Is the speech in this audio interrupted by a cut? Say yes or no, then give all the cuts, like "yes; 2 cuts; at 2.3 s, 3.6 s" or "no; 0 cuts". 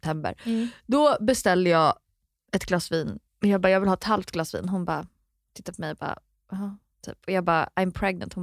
yes; 1 cut; at 3.3 s